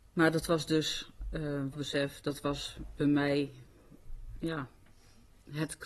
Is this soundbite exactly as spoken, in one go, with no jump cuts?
no; 1 cut; at 1.7 s

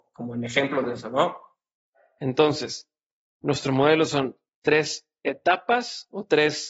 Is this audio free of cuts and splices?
yes; 0 cuts

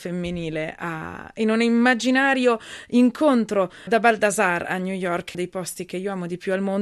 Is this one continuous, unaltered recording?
no; 2 cuts; at 3.9 s, 5.3 s

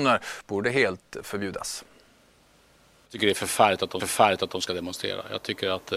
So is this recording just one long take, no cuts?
no; 1 cut; at 4.0 s

